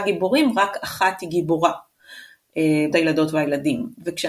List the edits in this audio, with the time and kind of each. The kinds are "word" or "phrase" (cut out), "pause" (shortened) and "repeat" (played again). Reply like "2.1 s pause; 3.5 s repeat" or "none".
2.9 s word